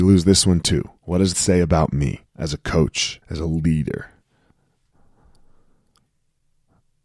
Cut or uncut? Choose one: cut